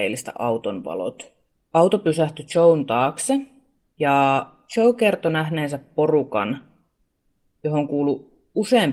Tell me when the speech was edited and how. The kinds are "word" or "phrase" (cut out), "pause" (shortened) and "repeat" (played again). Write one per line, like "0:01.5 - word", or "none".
none